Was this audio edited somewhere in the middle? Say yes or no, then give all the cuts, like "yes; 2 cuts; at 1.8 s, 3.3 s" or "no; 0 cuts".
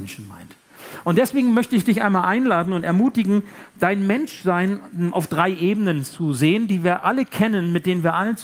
no; 0 cuts